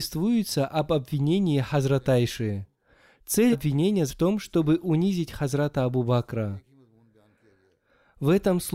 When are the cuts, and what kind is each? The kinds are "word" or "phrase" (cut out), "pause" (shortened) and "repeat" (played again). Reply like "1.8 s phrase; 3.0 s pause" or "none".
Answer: 3.5 s word; 4.1 s word